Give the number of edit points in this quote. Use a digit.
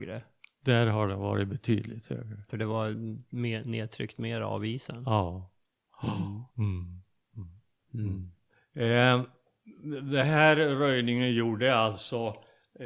2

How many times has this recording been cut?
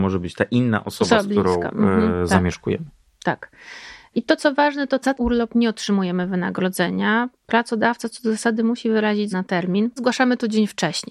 3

